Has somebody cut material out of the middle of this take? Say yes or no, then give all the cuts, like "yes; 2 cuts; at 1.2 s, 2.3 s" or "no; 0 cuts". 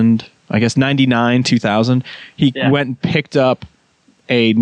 no; 0 cuts